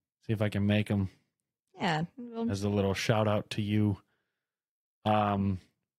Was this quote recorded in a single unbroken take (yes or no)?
yes